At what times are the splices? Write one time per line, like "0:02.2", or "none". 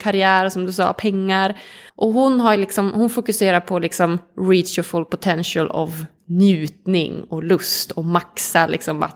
0:01.9